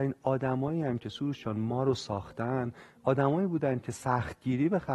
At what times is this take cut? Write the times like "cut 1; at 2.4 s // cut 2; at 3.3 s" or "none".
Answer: none